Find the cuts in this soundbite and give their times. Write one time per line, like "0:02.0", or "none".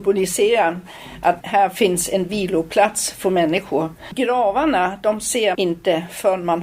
0:01.4
0:05.5